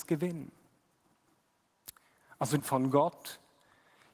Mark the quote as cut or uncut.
cut